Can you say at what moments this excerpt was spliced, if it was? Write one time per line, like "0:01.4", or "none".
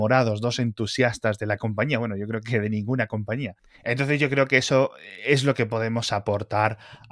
none